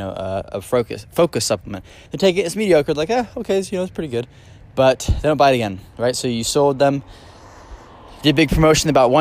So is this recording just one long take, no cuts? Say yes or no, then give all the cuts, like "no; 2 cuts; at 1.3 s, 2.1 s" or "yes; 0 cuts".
no; 1 cut; at 2.1 s